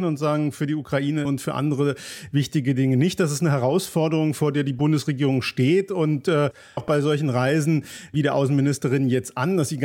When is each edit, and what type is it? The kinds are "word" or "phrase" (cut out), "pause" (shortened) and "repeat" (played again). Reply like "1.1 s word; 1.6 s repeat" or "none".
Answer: 1.3 s phrase; 6.8 s phrase